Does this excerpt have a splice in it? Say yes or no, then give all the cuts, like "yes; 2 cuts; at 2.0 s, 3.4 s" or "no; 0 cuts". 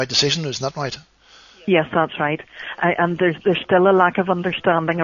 no; 0 cuts